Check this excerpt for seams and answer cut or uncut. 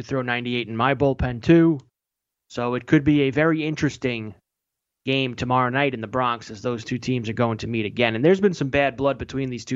uncut